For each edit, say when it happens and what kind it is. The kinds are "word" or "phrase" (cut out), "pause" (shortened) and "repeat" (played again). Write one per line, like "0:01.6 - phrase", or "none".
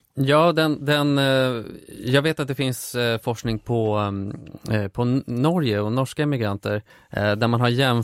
0:06.9 - pause